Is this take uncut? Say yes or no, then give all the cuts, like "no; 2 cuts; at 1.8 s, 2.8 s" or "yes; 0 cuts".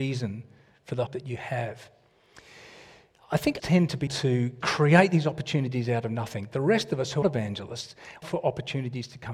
no; 6 cuts; at 1.1 s, 3.6 s, 4.1 s, 4.6 s, 7.2 s, 8.2 s